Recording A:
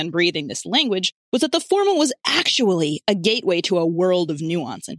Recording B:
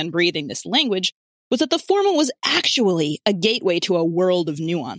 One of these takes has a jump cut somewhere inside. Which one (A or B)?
A